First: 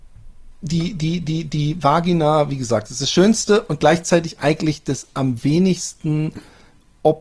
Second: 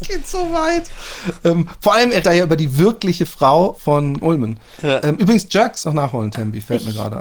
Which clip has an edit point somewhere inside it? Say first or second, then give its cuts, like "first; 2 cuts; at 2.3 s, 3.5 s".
second; 4 cuts; at 2.2 s, 4.2 s, 5.0 s, 5.8 s